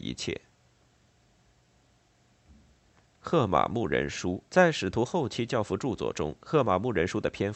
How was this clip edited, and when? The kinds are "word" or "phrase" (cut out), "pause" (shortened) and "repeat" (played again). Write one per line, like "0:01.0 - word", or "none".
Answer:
0:04.5 - pause